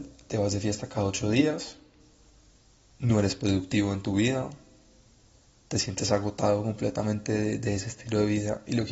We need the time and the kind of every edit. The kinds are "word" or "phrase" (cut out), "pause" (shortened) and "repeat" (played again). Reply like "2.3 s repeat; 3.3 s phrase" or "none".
none

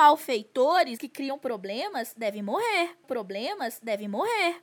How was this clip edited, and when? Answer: 1.0 s word; 3.0 s repeat

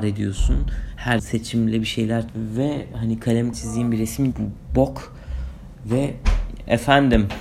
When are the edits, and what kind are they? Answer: 1.2 s word; 2.3 s word; 3.5 s word; 4.3 s word

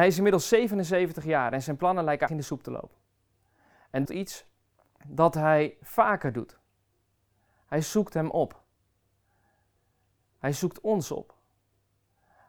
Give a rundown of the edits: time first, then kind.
2.3 s word; 4.1 s phrase

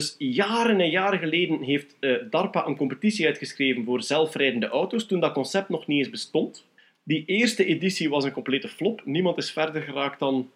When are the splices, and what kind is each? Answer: 6.8 s pause

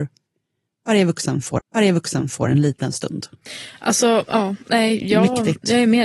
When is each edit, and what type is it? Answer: 1.6 s repeat

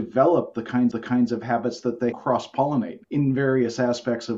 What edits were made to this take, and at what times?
0.9 s repeat; 2.1 s word; 3.0 s pause

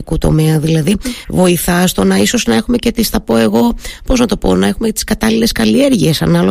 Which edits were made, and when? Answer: none

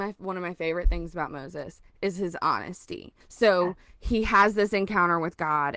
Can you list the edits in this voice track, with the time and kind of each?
3.2 s pause

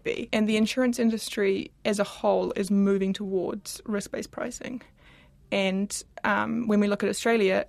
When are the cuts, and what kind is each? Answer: none

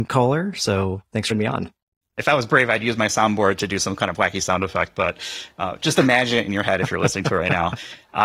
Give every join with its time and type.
1.3 s word

